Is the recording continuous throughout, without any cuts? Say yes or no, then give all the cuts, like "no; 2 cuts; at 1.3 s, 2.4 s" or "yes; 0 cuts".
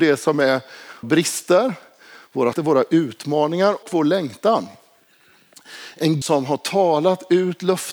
no; 4 cuts; at 1.0 s, 2.5 s, 3.8 s, 6.2 s